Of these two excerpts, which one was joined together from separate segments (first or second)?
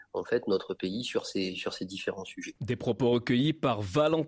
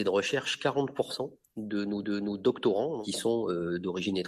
second